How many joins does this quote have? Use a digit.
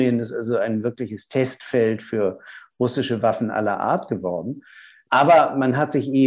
0